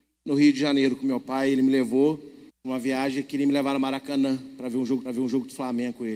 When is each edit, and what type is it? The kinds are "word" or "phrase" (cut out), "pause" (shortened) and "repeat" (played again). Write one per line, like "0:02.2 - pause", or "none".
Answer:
0:02.5 - pause
0:05.1 - repeat